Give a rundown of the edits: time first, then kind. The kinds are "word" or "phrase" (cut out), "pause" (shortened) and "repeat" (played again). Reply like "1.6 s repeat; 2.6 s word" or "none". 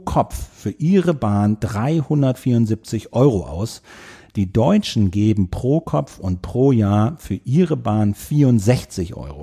none